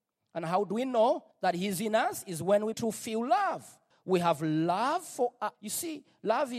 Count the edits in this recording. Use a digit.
4